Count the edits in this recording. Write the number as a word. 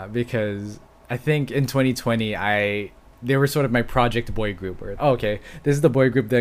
one